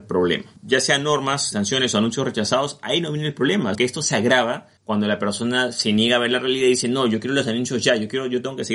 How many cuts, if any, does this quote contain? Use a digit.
2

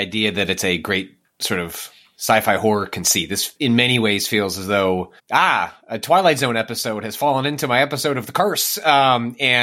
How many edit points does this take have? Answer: 2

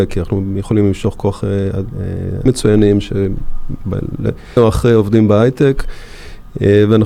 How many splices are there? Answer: 2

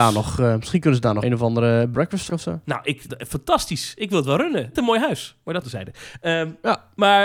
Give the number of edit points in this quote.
6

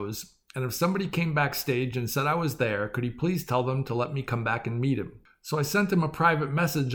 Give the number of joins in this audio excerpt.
0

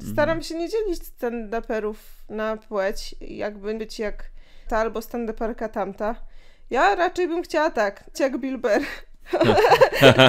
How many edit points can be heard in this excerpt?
3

